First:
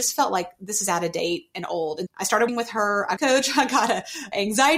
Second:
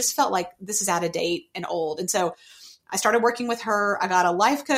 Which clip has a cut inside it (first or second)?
first